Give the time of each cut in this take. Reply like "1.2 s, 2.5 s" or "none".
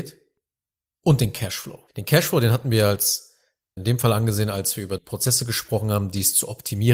1.9 s, 3.8 s, 5.0 s